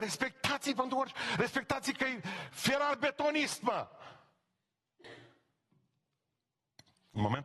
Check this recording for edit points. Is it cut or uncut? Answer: uncut